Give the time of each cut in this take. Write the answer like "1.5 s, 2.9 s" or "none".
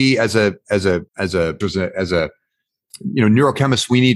1.1 s, 1.6 s